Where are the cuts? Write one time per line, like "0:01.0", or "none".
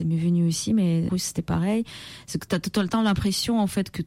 0:01.1
0:02.5